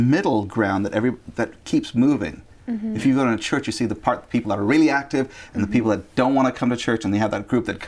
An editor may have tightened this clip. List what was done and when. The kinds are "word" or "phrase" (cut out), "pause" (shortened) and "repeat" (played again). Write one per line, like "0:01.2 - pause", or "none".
none

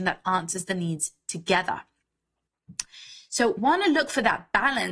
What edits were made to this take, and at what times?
0:03.6 - word

